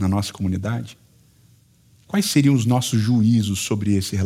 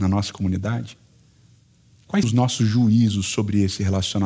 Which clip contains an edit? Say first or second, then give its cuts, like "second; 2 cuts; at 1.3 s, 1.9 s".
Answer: second; 1 cut; at 2.2 s